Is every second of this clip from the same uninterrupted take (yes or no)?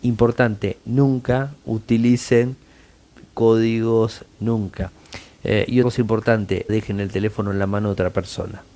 no